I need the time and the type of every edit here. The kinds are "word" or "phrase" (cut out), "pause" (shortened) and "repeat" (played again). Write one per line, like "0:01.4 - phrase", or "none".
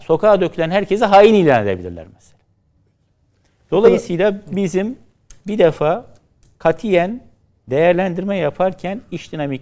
none